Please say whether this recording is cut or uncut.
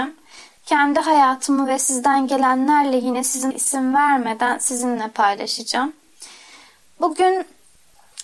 cut